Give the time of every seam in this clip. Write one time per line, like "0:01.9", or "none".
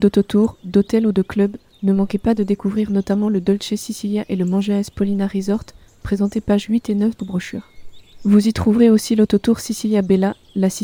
0:07.2